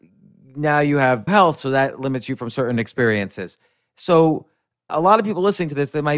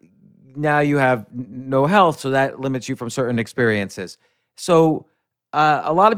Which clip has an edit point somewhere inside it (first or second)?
first